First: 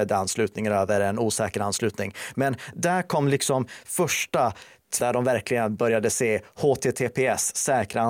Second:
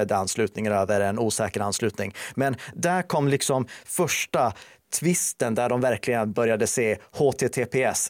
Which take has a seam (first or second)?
first